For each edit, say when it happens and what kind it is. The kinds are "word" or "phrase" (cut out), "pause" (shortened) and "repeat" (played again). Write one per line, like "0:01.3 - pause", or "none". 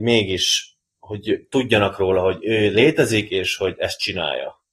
none